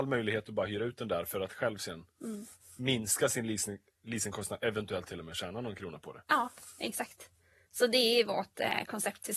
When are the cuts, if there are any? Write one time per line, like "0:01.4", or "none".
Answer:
none